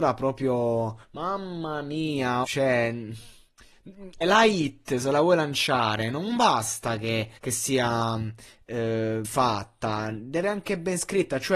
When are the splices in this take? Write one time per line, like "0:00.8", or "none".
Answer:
0:01.0
0:02.4
0:04.2
0:07.4
0:09.2
0:10.4